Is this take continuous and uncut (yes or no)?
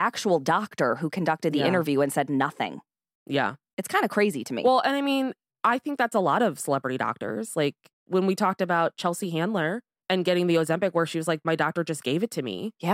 yes